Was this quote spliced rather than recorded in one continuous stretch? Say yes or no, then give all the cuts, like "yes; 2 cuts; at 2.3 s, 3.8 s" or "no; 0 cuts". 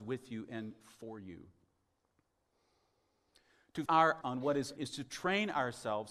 yes; 3 cuts; at 3.9 s, 4.2 s, 4.8 s